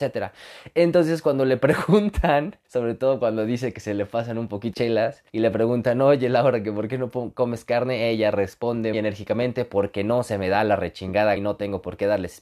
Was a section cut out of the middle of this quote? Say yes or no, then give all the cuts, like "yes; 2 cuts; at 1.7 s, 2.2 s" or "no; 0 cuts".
yes; 5 cuts; at 2.6 s, 4.7 s, 5.3 s, 8.9 s, 11.4 s